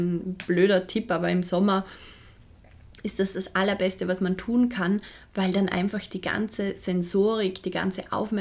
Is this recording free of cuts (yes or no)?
yes